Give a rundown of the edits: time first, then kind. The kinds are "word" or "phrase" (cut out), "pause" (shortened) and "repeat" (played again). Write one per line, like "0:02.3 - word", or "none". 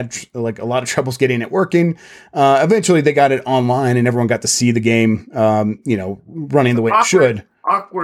none